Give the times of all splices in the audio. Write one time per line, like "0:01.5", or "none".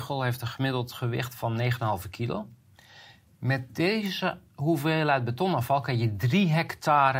none